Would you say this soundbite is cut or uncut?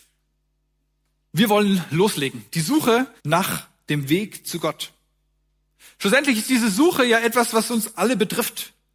cut